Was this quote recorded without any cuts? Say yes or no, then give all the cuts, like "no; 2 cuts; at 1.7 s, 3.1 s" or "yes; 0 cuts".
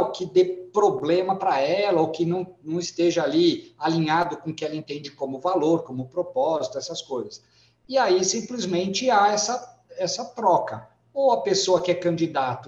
yes; 0 cuts